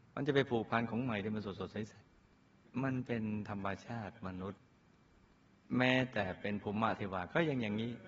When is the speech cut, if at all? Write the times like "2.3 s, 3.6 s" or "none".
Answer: 2.0 s